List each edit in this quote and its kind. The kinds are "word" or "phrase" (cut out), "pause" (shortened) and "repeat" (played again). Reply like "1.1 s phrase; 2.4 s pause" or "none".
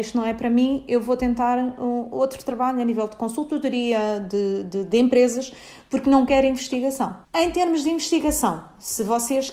7.2 s pause